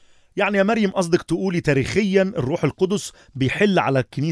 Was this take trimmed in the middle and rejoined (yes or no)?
no